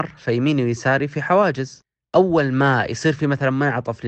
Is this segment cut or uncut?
uncut